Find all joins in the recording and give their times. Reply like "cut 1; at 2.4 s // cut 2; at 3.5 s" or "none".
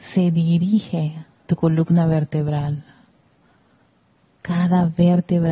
cut 1; at 1.4 s // cut 2; at 3.8 s